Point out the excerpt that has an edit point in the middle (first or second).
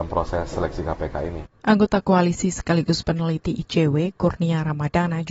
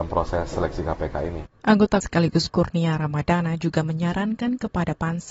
second